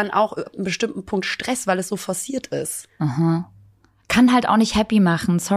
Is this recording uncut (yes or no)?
yes